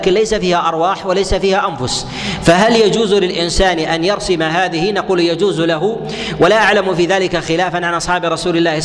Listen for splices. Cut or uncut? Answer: uncut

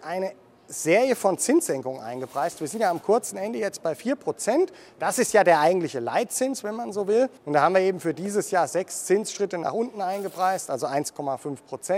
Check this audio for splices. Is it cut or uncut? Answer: cut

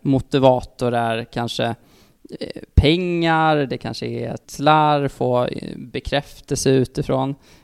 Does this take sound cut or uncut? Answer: cut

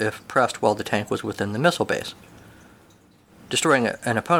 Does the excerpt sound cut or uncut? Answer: uncut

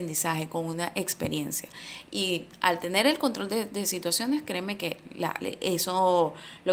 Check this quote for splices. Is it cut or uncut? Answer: uncut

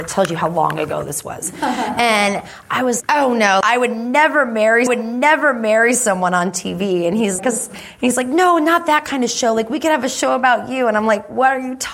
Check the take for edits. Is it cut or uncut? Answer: cut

